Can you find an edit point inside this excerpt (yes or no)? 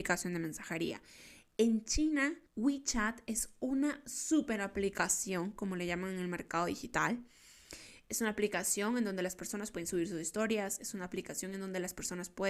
yes